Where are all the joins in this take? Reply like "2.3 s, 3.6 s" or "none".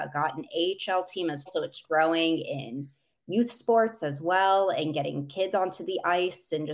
1.5 s, 1.8 s